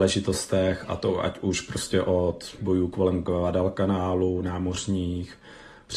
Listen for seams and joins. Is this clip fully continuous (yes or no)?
no